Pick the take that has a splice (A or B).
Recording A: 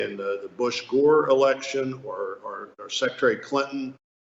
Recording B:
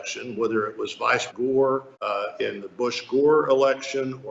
B